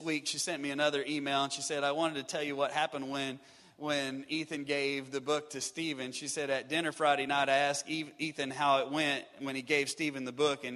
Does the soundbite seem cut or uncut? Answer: uncut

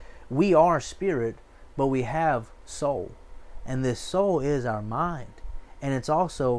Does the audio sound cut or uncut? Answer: uncut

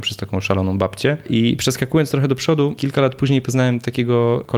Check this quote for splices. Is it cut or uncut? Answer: uncut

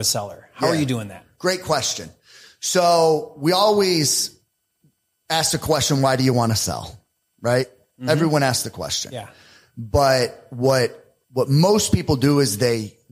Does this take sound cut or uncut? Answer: uncut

